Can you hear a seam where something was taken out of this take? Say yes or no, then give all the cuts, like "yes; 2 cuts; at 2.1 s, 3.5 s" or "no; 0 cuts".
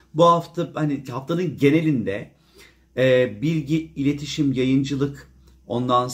no; 0 cuts